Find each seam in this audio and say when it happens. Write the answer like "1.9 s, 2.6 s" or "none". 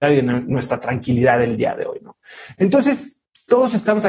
none